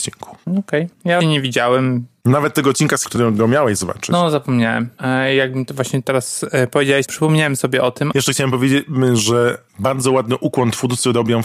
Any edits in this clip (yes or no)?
yes